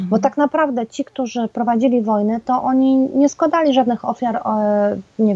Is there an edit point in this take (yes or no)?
no